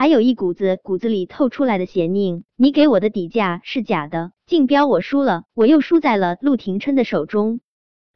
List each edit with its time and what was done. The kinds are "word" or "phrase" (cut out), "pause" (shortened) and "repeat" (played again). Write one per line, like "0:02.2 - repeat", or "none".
0:02.5 - pause
0:04.4 - pause
0:05.5 - pause